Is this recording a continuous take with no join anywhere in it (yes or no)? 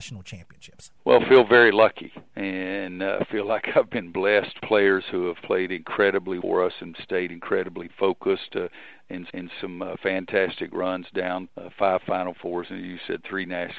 no